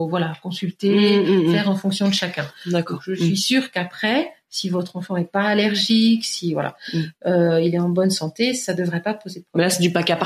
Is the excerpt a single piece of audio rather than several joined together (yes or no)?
yes